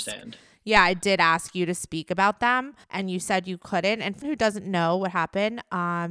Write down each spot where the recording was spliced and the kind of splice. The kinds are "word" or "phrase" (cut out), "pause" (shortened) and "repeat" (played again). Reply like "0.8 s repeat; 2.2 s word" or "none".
2.8 s pause; 4.2 s word